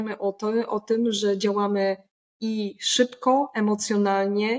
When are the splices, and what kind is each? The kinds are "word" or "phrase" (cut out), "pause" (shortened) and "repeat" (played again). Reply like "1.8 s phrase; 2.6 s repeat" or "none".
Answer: none